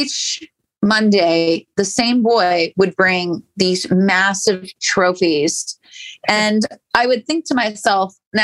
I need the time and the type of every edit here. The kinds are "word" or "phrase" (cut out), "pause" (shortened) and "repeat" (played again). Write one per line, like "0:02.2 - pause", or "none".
none